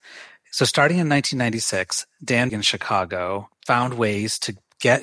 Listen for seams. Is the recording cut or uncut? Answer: cut